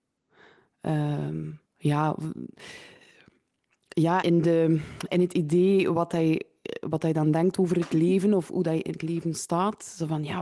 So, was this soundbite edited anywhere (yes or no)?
yes